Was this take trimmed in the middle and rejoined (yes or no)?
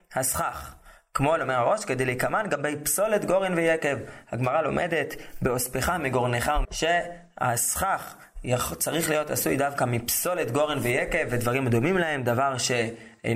yes